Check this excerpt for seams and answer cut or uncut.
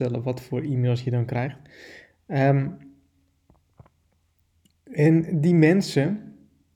uncut